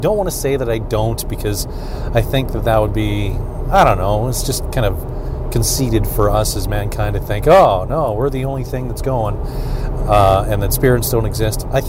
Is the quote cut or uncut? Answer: uncut